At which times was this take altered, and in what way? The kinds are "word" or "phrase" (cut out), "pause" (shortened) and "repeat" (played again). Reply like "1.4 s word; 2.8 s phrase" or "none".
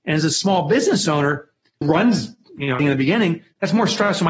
1.8 s word; 2.8 s word